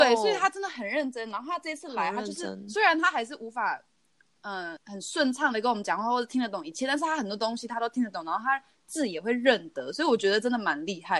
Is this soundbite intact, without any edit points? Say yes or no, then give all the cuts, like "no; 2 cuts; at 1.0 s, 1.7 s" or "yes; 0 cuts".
no; 1 cut; at 4.8 s